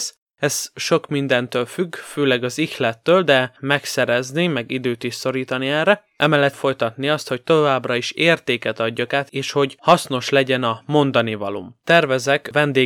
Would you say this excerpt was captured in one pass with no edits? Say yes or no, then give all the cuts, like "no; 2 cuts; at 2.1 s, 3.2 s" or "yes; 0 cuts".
no; 2 cuts; at 3.6 s, 6.5 s